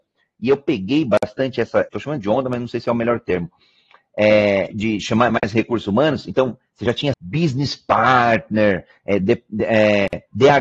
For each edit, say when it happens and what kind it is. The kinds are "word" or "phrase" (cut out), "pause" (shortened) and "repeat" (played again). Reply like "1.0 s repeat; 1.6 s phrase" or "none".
1.9 s word; 4.7 s word; 7.1 s word